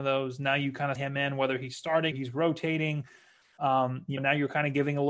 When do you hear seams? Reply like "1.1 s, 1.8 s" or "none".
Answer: 1.0 s, 2.1 s, 4.2 s